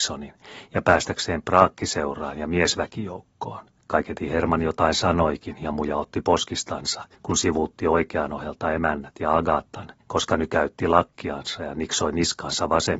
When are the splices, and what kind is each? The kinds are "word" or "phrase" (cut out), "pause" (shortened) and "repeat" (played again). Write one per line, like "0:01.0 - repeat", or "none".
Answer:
0:03.8 - pause
0:07.1 - pause
0:10.0 - pause